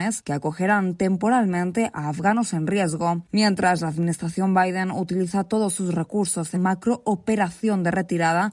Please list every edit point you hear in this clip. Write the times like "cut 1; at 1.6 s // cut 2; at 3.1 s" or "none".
cut 1; at 6.5 s